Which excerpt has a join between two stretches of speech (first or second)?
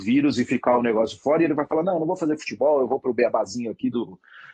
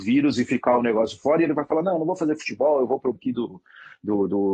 second